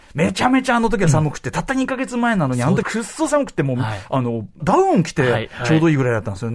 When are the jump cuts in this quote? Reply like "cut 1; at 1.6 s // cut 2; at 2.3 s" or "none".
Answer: cut 1; at 2.8 s // cut 2; at 4.6 s